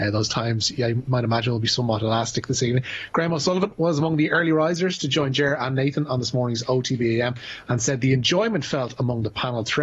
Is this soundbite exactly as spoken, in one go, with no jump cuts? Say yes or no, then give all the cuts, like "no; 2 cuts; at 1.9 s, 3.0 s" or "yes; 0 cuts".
yes; 0 cuts